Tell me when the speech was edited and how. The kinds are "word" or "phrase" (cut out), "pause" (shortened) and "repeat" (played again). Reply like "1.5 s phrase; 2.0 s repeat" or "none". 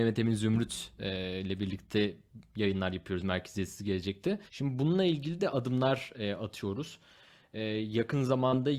4.5 s pause